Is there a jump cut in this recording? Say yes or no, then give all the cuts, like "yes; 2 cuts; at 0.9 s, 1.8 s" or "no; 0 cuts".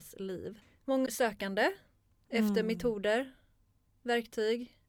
yes; 1 cut; at 1.1 s